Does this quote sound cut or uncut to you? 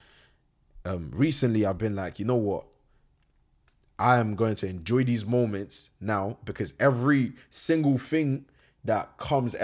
uncut